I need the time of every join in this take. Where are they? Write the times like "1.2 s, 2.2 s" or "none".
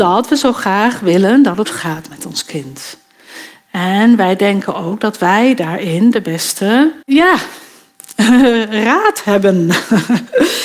1.6 s, 7.0 s